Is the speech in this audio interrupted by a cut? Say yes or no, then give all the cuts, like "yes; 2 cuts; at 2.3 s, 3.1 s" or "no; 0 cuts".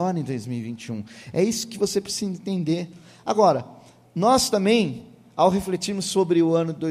no; 0 cuts